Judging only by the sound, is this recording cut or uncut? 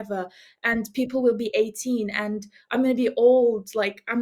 uncut